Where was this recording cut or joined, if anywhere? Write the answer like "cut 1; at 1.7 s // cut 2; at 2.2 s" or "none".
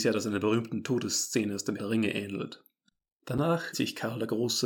cut 1; at 1.8 s // cut 2; at 3.7 s